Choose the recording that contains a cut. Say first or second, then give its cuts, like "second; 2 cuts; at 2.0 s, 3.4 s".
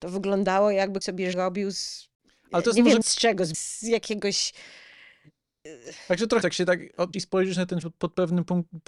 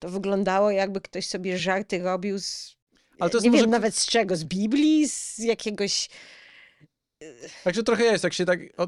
first; 7 cuts; at 1.0 s, 1.3 s, 3.0 s, 3.5 s, 6.4 s, 7.1 s, 7.8 s